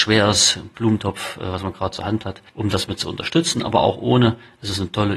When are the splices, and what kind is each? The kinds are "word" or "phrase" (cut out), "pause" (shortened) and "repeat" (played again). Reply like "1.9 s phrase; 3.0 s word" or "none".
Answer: 2.5 s pause

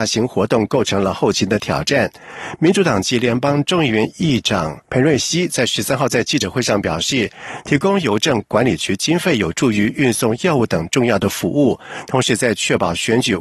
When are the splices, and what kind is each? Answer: 4.8 s pause

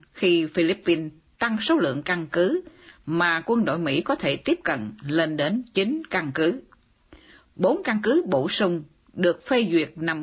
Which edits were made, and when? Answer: none

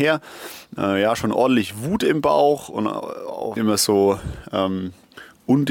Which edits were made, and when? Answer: 3.6 s phrase

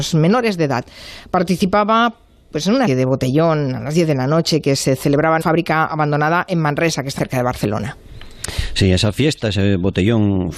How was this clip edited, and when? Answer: 2.9 s word; 5.4 s word; 7.2 s word

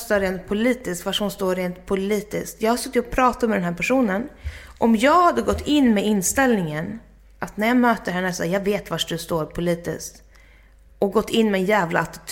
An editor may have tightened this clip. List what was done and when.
none

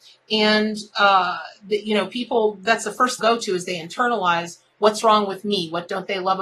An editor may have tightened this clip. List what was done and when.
3.2 s phrase

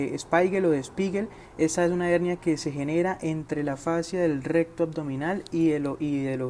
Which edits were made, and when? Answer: none

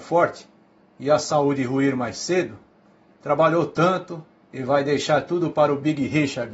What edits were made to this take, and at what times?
4.4 s pause

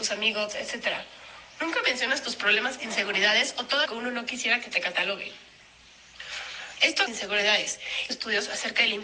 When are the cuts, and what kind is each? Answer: 2.8 s word; 3.9 s word; 7.1 s phrase; 8.1 s phrase

